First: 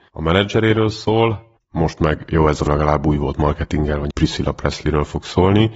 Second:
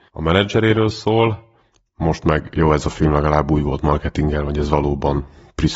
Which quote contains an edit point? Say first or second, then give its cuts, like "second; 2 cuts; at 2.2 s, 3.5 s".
first; 3 cuts; at 1.6 s, 2.7 s, 4.1 s